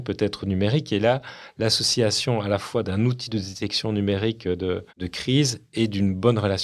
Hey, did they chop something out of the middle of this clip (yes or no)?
yes